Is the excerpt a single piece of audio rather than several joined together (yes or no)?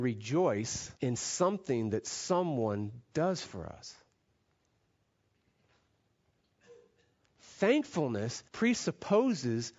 no